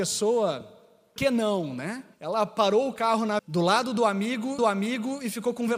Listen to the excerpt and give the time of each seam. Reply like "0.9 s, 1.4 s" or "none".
1.2 s, 2.1 s, 3.4 s, 4.6 s